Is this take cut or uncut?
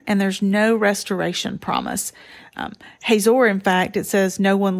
uncut